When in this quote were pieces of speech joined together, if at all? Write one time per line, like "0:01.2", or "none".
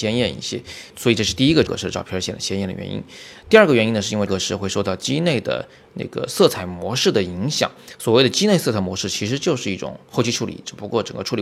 0:01.7
0:04.3